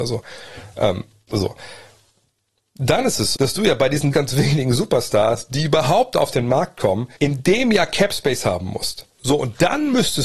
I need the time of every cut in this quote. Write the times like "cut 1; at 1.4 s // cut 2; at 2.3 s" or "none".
cut 1; at 3.3 s // cut 2; at 4.1 s // cut 3; at 7.2 s // cut 4; at 9.1 s